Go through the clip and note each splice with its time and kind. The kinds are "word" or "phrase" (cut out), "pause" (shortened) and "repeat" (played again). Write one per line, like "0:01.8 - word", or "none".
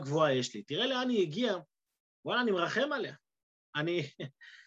0:02.1 - pause